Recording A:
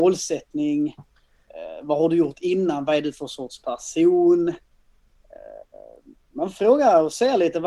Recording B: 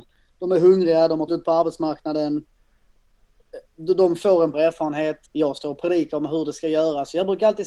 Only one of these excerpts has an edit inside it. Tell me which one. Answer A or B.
B